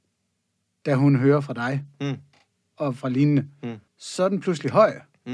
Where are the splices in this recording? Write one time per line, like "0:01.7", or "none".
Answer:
0:03.9